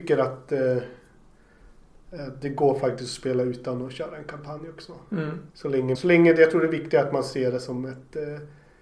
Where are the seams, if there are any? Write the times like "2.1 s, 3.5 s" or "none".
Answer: 5.5 s, 5.9 s